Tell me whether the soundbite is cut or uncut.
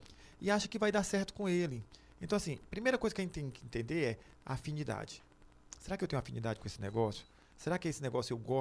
uncut